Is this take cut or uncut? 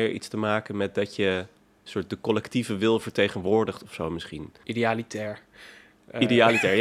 uncut